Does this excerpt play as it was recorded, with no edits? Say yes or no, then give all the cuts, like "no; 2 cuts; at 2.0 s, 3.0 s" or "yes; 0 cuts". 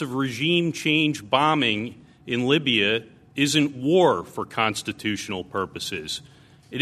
yes; 0 cuts